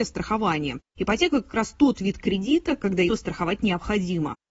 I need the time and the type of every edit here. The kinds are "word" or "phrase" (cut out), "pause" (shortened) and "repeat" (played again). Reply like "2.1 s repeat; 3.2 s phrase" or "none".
3.1 s word